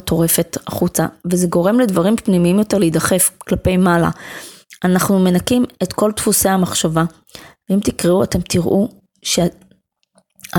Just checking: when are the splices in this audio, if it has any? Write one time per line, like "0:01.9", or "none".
none